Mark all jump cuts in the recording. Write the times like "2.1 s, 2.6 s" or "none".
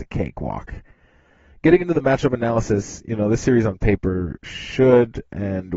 none